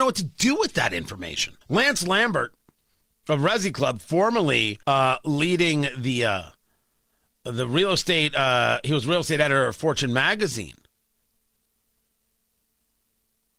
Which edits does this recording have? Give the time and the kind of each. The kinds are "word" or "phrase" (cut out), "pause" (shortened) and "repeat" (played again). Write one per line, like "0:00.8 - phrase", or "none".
0:01.6 - pause
0:04.8 - pause

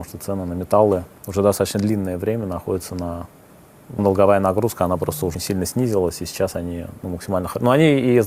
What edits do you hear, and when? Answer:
0:04.0 - phrase
0:05.3 - word

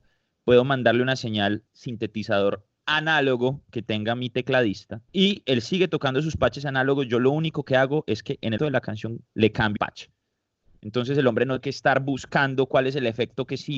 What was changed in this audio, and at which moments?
0:01.7 - word
0:05.1 - pause
0:08.6 - word
0:09.2 - pause
0:09.8 - word
0:11.6 - word

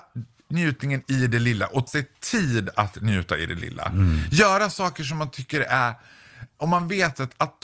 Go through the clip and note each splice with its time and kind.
0:01.9 - word

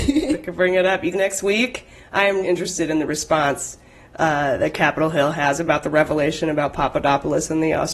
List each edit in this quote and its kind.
0:01.1 - word
0:02.4 - word

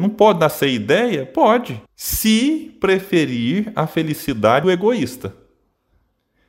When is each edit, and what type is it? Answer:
0:01.9 - pause
0:04.6 - word

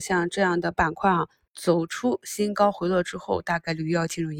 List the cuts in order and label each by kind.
none

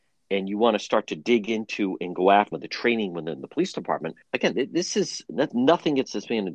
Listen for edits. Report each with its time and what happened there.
0:02.5 - word
0:04.2 - pause
0:05.5 - word

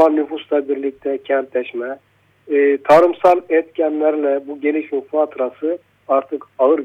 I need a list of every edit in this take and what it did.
none

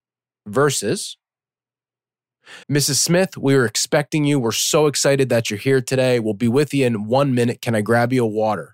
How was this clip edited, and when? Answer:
0:02.6 - pause

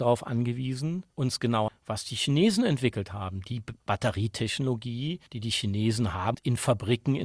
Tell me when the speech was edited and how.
0:01.1 - pause
0:01.7 - word
0:05.3 - pause
0:06.3 - phrase

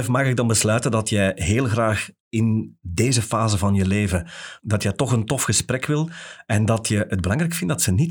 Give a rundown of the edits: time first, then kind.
0:02.2 - pause

